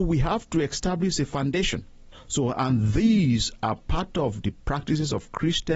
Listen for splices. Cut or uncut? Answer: uncut